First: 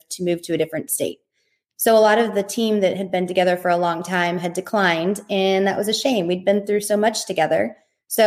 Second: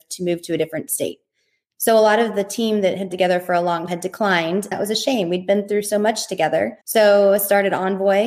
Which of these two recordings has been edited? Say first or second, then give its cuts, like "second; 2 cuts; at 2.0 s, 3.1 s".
second; 4 cuts; at 3.1 s, 3.9 s, 4.7 s, 6.8 s